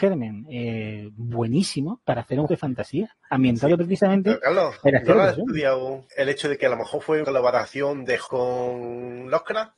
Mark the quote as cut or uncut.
cut